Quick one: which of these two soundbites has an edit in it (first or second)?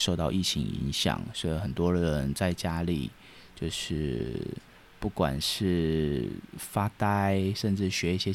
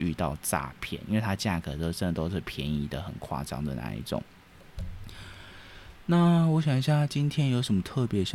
first